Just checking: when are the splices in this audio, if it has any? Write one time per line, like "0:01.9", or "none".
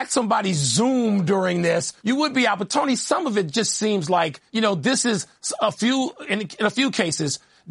0:02.0
0:04.5